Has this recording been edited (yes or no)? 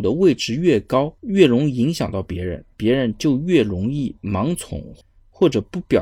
yes